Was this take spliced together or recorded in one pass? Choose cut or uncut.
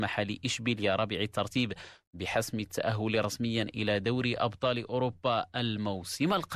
uncut